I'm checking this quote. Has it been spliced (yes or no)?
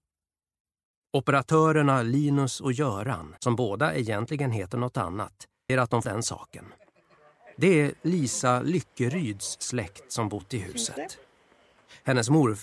yes